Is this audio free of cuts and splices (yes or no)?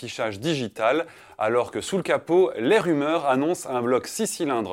yes